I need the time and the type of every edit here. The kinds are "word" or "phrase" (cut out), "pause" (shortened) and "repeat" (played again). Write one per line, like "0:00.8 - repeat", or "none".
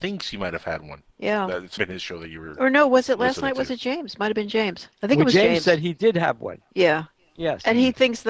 0:01.1 - pause
0:01.8 - phrase
0:04.9 - pause